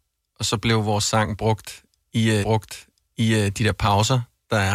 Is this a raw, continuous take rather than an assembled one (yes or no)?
no